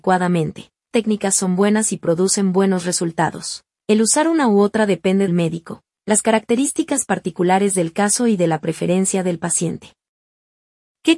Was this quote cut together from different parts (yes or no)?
yes